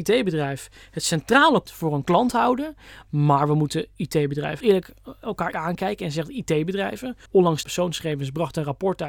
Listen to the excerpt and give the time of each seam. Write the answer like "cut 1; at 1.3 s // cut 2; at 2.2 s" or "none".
cut 1; at 1.7 s // cut 2; at 4.6 s // cut 3; at 5.5 s // cut 4; at 7.3 s // cut 5; at 7.6 s